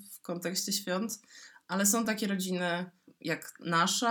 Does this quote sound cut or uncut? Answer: uncut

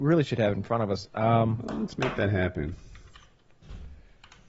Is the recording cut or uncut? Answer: uncut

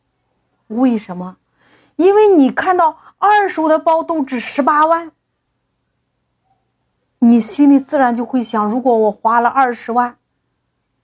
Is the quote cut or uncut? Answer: uncut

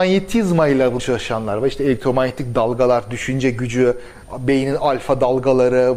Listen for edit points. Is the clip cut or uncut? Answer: cut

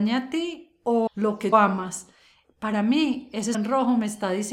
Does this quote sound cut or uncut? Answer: cut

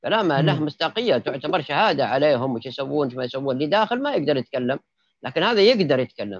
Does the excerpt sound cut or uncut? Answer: uncut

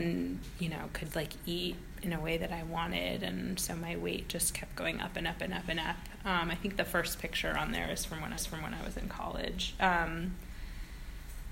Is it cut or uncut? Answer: cut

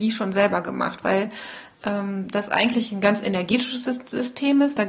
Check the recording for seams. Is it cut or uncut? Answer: uncut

